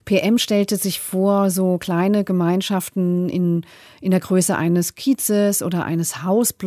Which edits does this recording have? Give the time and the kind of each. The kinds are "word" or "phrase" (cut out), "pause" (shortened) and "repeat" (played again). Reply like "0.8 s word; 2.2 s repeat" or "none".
none